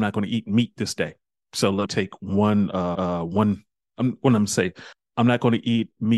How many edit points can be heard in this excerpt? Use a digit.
2